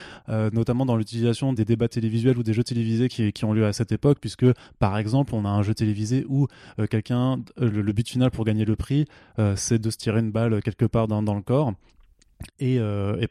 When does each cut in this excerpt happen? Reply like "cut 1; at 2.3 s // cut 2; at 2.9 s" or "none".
cut 1; at 1.5 s